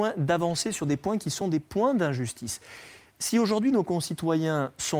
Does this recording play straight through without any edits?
yes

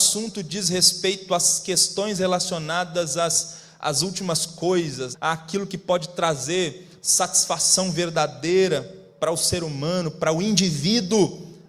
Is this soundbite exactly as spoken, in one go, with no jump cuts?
no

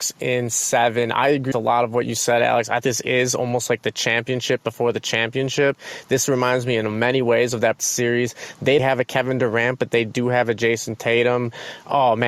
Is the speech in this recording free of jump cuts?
no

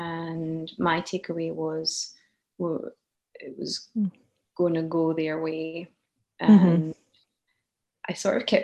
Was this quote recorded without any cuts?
yes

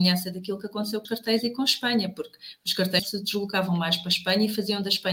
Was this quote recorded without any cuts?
no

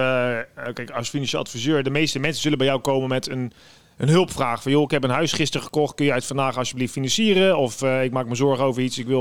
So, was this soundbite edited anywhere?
no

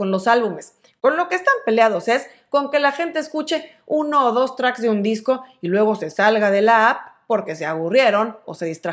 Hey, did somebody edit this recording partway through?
no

